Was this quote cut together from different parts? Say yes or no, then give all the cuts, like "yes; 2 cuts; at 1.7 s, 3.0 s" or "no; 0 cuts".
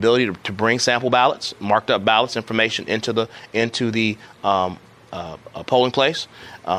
no; 0 cuts